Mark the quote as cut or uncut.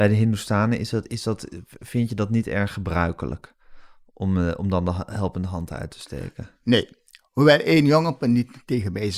uncut